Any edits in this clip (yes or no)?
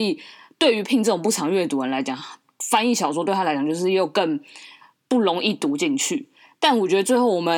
no